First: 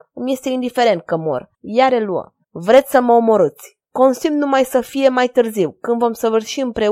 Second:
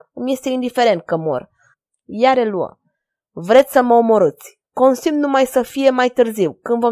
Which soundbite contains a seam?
first; 2 cuts; at 1.5 s, 2.4 s

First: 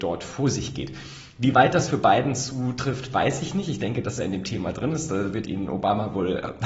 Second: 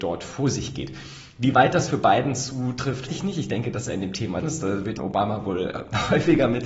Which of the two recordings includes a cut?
second; 3 cuts; at 3.1 s, 4.4 s, 5.0 s

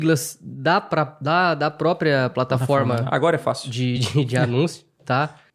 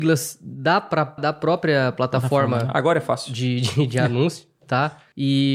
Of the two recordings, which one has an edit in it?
second; 1 cut; at 1.2 s

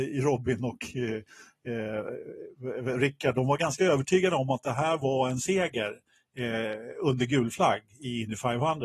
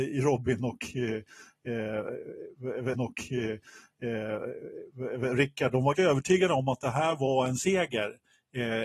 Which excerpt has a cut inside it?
second; 2 cuts; at 2.9 s, 5.9 s

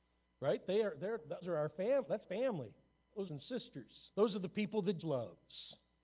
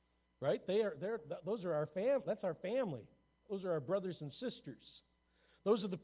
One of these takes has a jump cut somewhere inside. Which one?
first; 5 cuts; at 1.4 s, 2.2 s, 3.3 s, 4.1 s, 5.0 s

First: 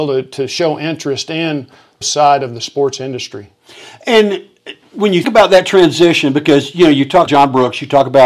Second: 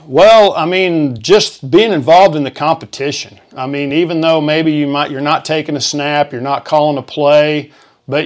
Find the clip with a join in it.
first; 3 cuts; at 2.0 s, 5.2 s, 7.3 s

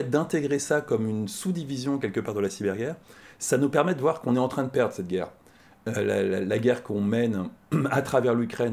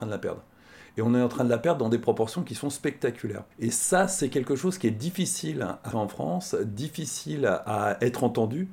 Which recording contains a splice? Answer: second; 2 cuts; at 3.5 s, 5.9 s

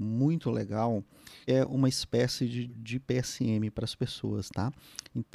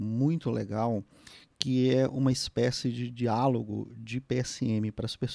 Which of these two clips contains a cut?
first; 2 cuts; at 1.5 s, 2.7 s

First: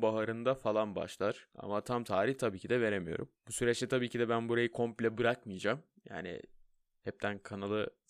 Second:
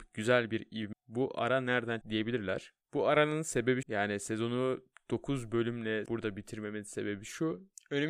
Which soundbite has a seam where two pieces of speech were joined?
second; 4 cuts; at 0.9 s, 2.0 s, 3.8 s, 6.1 s

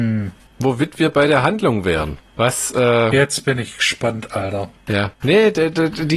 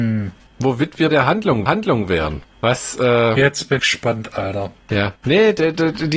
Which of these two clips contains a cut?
second; 3 cuts; at 1.1 s, 1.7 s, 3.8 s

